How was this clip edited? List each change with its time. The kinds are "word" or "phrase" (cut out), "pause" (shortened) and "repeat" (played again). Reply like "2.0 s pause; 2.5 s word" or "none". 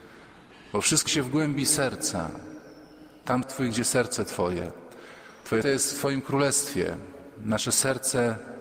1.1 s word; 3.4 s word; 5.6 s word